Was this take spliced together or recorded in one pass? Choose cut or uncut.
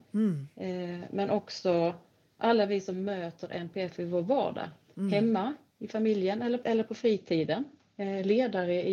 cut